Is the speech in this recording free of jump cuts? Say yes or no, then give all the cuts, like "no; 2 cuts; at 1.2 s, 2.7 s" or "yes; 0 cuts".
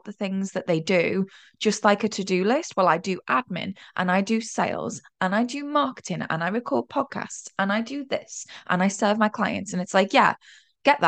yes; 0 cuts